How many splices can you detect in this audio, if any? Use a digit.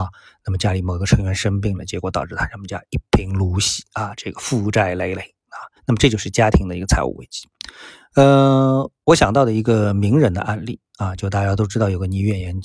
2